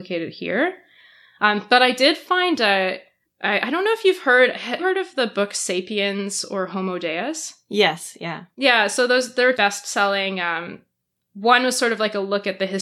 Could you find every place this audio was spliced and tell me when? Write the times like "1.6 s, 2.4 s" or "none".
3.2 s, 4.8 s, 9.5 s